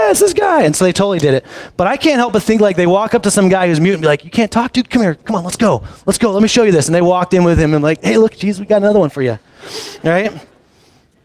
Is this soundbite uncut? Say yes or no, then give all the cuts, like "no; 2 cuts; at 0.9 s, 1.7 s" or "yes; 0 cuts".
yes; 0 cuts